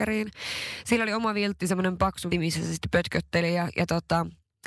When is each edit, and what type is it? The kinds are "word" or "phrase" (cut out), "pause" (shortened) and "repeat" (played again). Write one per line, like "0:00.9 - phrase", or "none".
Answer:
0:02.3 - word